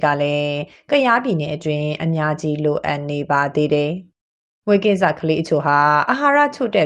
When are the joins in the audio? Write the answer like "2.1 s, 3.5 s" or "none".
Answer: none